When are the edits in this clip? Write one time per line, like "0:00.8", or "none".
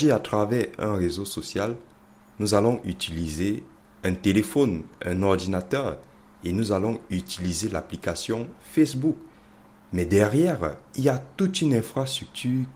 none